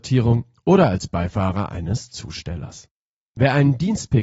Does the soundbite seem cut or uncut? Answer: uncut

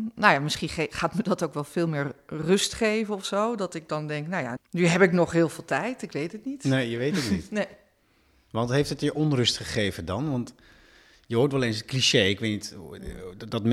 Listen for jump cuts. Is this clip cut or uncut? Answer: cut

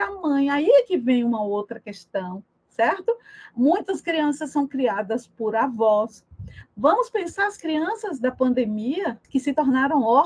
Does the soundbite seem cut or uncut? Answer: uncut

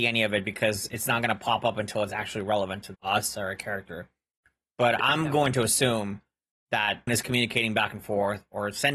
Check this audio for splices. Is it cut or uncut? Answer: cut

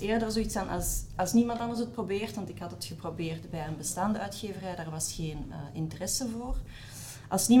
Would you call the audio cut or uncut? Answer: uncut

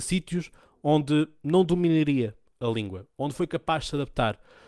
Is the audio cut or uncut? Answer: uncut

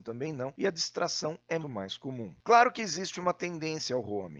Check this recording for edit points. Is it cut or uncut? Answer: cut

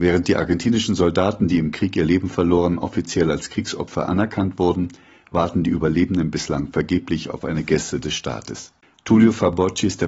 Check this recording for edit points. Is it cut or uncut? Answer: uncut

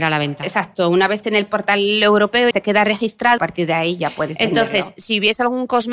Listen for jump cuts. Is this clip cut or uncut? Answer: cut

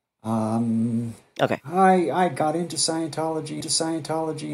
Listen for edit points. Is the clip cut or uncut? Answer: cut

